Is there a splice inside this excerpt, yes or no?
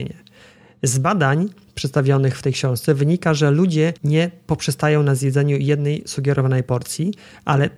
yes